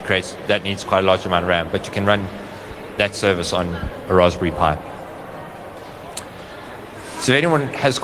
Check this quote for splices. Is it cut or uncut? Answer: uncut